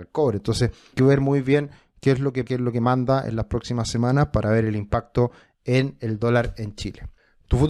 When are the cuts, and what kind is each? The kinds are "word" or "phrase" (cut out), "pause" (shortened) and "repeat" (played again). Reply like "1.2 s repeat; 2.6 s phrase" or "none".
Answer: 0.9 s word; 2.5 s word